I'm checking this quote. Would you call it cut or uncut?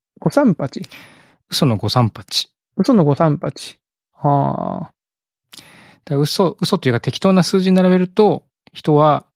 uncut